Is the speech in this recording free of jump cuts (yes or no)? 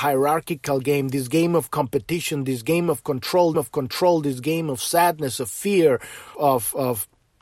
no